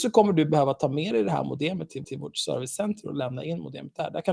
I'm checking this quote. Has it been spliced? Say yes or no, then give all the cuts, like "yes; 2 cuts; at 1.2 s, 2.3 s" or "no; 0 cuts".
yes; 1 cut; at 2.0 s